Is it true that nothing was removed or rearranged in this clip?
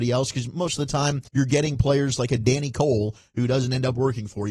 no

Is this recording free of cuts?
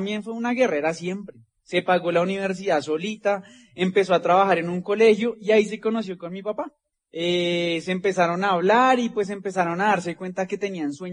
no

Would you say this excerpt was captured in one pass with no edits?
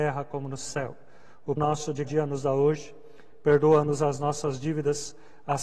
no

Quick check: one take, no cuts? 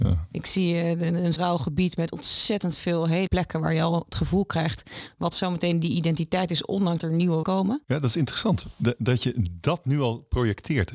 no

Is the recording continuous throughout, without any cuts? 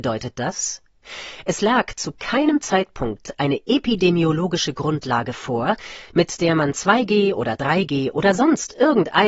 yes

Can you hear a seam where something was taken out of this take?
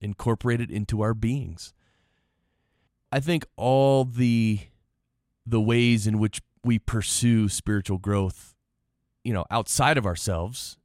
no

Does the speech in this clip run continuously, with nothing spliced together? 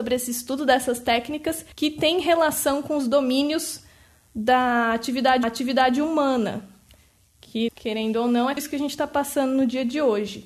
no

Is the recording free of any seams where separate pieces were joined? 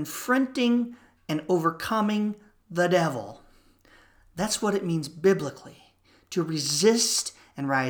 yes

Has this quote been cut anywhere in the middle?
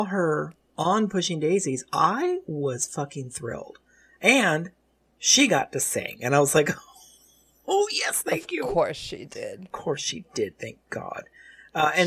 no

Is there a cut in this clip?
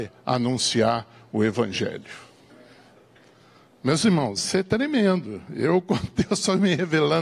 no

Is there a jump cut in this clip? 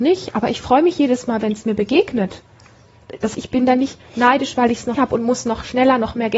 yes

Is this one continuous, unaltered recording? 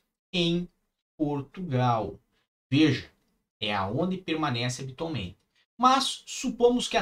yes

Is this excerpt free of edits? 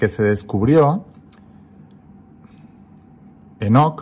yes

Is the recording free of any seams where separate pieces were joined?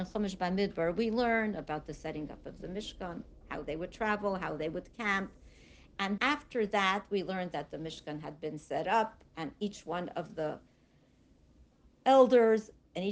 no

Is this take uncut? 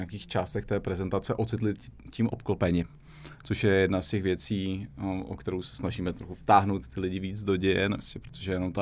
no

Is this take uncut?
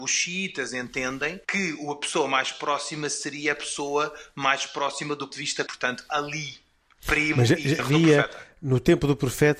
no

